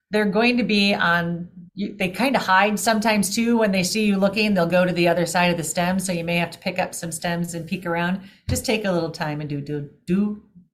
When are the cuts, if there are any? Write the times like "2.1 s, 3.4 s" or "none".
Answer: 1.7 s